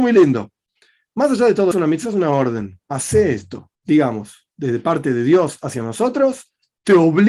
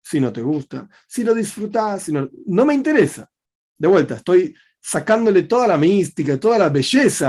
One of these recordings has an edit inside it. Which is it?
first; 3 cuts; at 1.7 s, 2.8 s, 3.7 s

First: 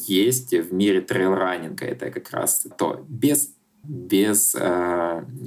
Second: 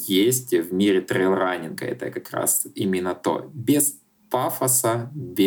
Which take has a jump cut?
first; 2 cuts; at 2.7 s, 3.8 s

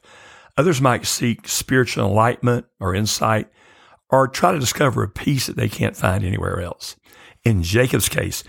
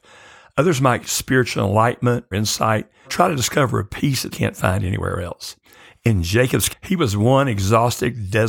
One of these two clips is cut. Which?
second; 5 cuts; at 1.0 s, 2.3 s, 3.0 s, 4.3 s, 6.7 s

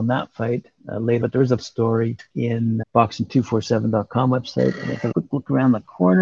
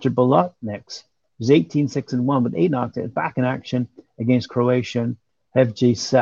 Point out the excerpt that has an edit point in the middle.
first; 5 cuts; at 1.2 s, 1.6 s, 2.3 s, 2.8 s, 5.1 s

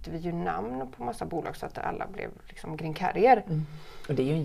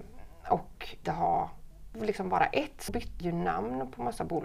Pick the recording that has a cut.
second; 4 cuts; at 1.0 s, 1.9 s, 2.9 s, 3.2 s

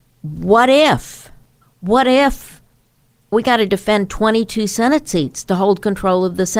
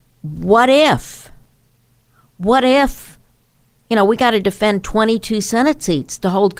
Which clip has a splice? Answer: first; 2 cuts; at 1.6 s, 3.3 s

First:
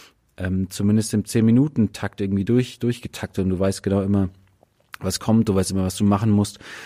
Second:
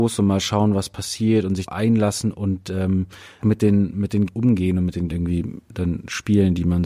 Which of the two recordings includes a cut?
second; 4 cuts; at 1.7 s, 3.4 s, 4.3 s, 5.1 s

